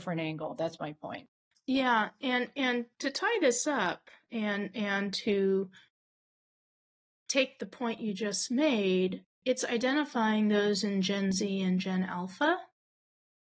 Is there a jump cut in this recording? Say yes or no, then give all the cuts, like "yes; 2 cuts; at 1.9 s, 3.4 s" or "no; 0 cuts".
no; 0 cuts